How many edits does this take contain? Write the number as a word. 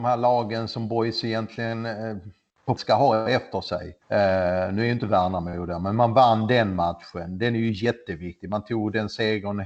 two